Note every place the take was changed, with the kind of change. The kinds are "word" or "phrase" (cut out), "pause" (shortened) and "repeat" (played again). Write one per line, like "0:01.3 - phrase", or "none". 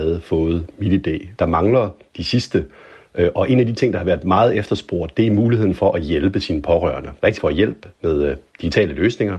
0:01.4 - word
0:07.4 - word